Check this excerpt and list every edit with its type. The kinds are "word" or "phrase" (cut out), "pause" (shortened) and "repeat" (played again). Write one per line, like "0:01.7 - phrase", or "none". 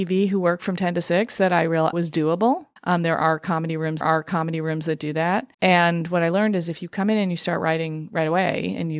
0:01.9 - phrase
0:02.8 - pause
0:04.0 - repeat
0:05.5 - pause